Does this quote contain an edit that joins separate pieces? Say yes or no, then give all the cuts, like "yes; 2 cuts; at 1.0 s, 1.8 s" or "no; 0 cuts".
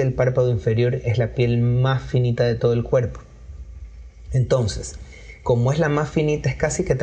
no; 0 cuts